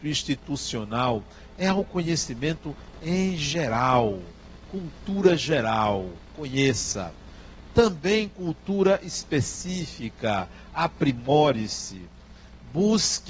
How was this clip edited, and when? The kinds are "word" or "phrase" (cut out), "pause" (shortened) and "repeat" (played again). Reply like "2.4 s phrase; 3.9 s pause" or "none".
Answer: none